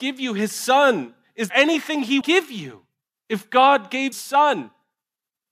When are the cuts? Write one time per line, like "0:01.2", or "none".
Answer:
0:01.5
0:02.2
0:03.0
0:04.1